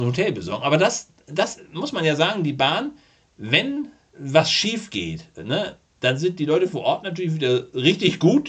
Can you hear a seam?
no; 0 cuts

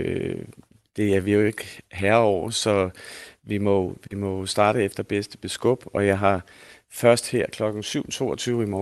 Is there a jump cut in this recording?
no; 0 cuts

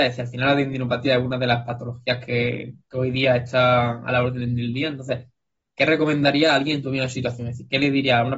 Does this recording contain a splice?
no; 0 cuts

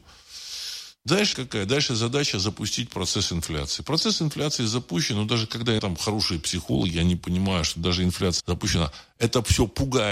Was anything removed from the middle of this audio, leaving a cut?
yes; 3 cuts; at 1.3 s, 5.8 s, 8.4 s

